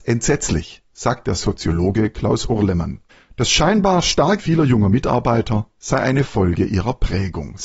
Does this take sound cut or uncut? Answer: cut